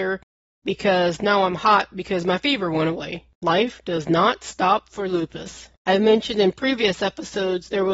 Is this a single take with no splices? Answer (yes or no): no